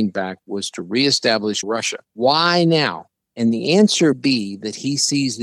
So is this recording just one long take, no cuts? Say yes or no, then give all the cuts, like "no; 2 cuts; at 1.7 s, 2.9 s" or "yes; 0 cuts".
no; 3 cuts; at 1.6 s, 2.0 s, 4.1 s